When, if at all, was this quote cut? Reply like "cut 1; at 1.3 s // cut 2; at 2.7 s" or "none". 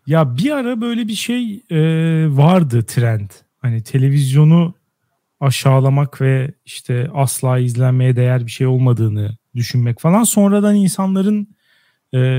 cut 1; at 3.5 s // cut 2; at 9.4 s